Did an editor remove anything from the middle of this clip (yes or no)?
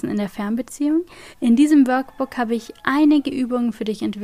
yes